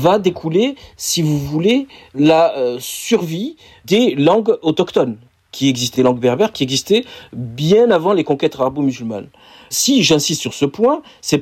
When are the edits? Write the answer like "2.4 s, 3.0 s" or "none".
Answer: 6.0 s

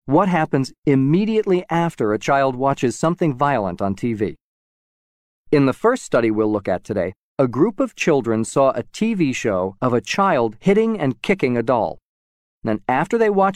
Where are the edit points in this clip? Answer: none

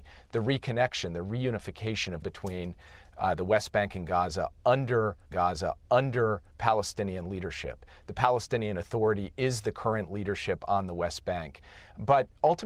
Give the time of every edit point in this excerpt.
2.2 s, 5.3 s

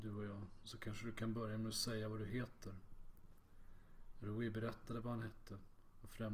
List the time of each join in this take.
none

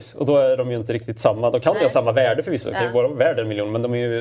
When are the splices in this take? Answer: none

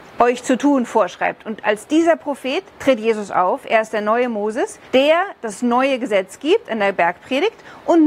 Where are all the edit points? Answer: 2.7 s, 4.8 s

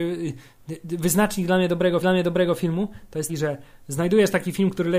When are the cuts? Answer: 2.0 s, 3.3 s

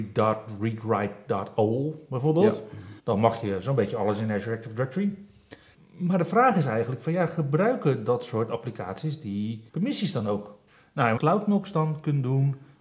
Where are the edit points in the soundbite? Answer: 3.0 s, 5.7 s, 9.7 s, 10.7 s, 11.2 s

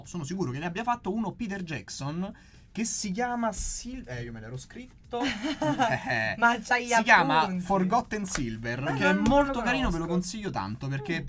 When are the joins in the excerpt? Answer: none

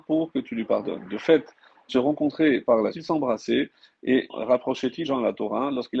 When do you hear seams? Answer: 1.9 s, 2.9 s, 4.3 s, 5.0 s

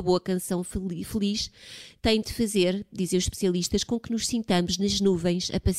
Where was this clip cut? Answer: none

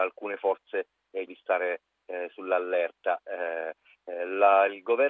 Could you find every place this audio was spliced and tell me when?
1.3 s

